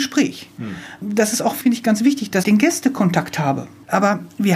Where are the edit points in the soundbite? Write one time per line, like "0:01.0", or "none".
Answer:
0:01.6
0:02.4